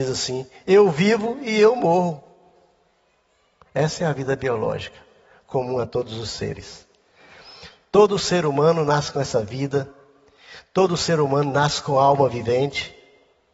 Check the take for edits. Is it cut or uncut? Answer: uncut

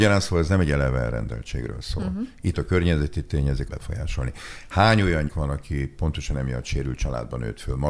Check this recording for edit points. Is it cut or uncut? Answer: cut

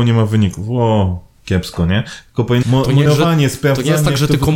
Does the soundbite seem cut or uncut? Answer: cut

